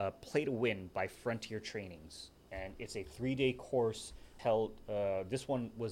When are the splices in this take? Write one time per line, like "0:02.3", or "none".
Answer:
0:04.4

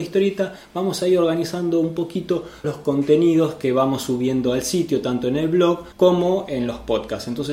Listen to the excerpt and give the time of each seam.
0:02.6
0:05.9

